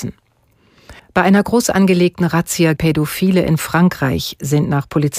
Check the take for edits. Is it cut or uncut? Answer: cut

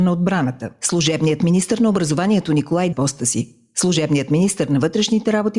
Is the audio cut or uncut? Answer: cut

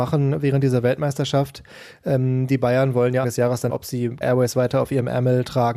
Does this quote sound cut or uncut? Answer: cut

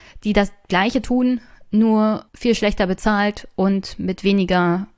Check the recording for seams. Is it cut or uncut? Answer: cut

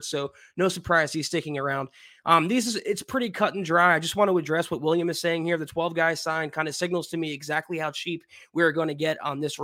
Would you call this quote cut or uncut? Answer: uncut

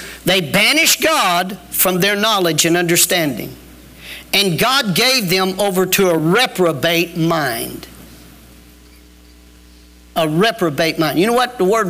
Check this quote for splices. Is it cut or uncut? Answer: uncut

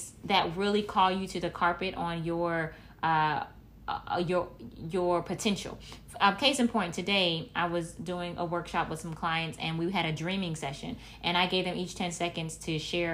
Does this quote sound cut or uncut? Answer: uncut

